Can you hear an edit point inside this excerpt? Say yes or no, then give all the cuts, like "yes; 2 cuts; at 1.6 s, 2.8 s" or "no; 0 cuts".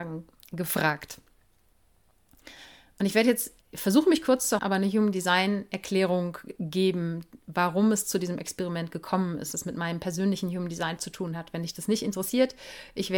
yes; 4 cuts; at 3.6 s, 4.6 s, 9.5 s, 11.0 s